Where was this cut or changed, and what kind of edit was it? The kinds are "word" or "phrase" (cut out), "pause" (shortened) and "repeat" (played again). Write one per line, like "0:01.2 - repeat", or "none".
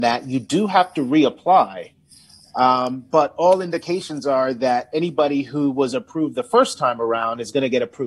none

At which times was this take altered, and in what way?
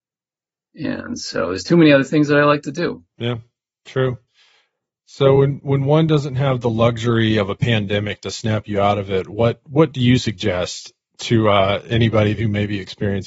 none

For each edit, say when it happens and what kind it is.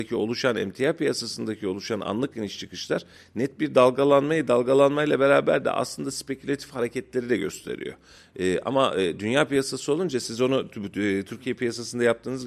none

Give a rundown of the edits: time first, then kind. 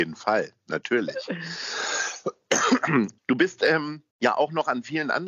0:03.2 - pause
0:04.1 - pause

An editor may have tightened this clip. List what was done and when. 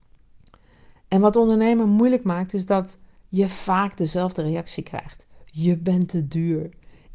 none

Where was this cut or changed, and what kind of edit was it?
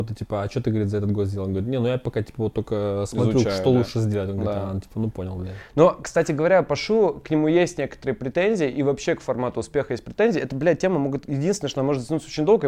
none

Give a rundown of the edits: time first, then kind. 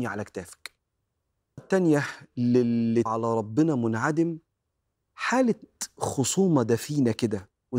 0:01.6 - word
0:03.1 - word

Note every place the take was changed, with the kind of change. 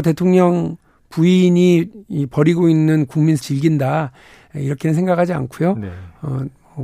0:03.4 - phrase

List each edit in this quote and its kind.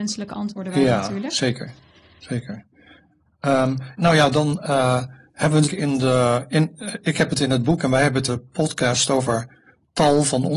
0:04.0 - word
0:05.7 - word
0:08.3 - word

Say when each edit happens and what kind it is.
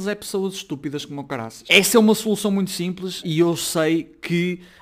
0:03.2 - word

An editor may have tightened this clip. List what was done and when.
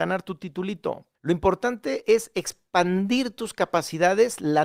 0:01.1 - pause

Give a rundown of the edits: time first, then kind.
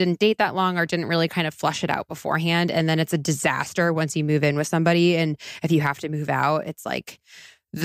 none

